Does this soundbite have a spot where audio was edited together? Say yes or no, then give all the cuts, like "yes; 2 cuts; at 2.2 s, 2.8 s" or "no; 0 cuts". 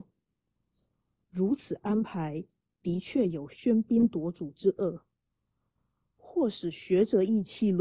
no; 0 cuts